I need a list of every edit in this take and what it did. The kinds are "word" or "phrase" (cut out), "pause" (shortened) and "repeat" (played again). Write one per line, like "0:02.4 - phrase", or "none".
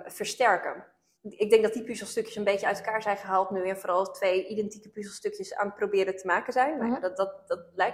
0:01.2 - pause